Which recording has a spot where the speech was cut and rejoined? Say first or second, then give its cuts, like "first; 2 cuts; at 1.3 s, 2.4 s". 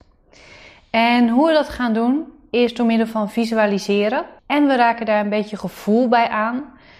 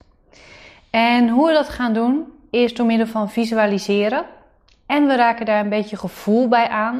first; 1 cut; at 4.4 s